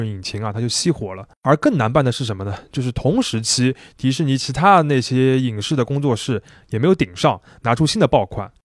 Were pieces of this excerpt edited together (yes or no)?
no